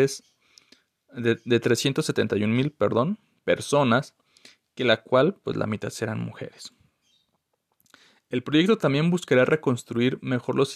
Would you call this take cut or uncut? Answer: uncut